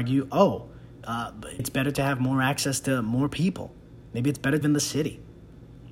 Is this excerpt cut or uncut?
cut